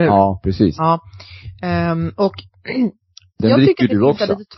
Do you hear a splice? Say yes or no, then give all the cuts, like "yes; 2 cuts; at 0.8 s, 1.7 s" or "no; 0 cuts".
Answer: no; 0 cuts